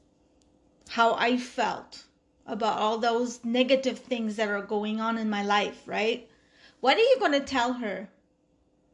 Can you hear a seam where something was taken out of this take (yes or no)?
no